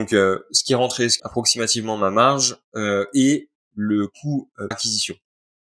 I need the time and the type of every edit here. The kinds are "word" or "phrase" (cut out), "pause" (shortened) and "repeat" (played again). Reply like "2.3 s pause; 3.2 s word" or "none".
1.2 s phrase; 4.7 s word